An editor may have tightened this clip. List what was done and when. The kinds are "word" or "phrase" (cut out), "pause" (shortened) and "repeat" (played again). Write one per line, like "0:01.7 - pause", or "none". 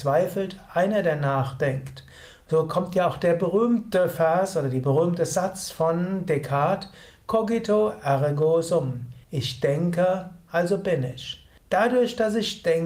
0:09.2 - pause
0:11.6 - pause